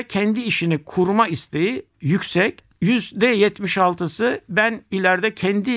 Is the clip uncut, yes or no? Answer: yes